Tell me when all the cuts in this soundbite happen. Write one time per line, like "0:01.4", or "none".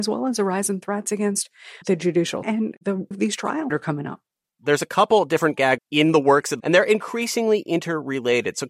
0:01.8
0:02.4
0:03.1
0:03.7
0:05.8
0:06.6